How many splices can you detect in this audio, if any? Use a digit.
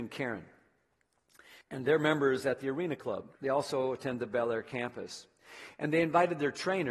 2